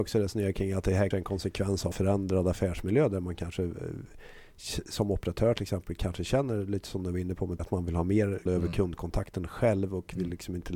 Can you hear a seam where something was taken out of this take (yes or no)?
yes